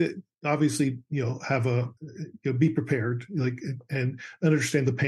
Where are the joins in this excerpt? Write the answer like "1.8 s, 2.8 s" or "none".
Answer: 2.0 s